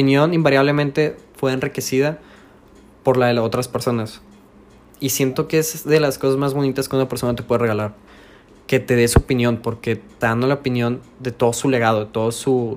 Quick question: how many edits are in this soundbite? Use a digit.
1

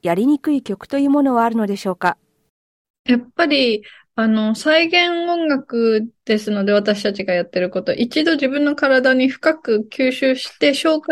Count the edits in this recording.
0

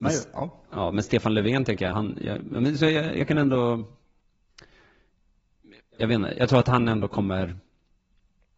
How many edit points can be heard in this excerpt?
1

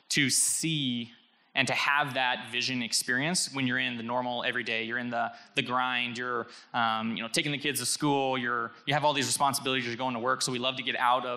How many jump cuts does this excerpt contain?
0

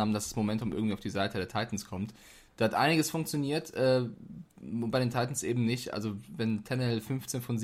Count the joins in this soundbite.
0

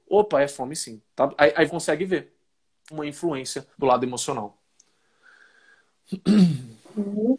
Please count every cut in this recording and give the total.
4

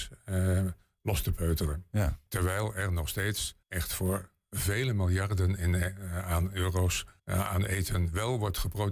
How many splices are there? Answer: 3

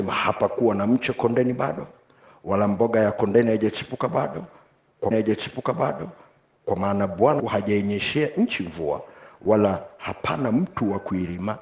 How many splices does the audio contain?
2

